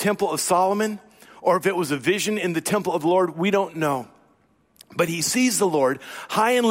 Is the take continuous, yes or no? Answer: yes